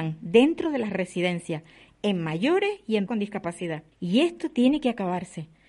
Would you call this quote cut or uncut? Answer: cut